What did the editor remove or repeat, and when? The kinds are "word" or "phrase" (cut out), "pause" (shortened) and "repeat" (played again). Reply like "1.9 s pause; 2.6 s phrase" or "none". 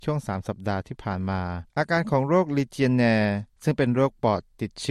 1.7 s pause; 3.5 s pause